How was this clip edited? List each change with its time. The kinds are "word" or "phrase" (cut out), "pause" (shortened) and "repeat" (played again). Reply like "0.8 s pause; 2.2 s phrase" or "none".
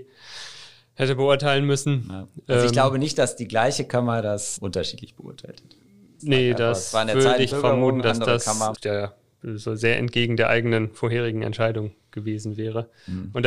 7.5 s word; 8.7 s word